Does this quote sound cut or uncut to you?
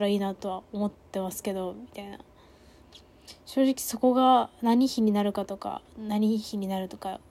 uncut